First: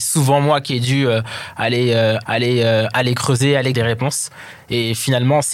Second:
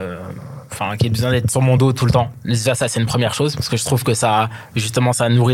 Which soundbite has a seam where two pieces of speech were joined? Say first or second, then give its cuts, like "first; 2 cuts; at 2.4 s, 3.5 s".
first; 2 cuts; at 2.2 s, 3.7 s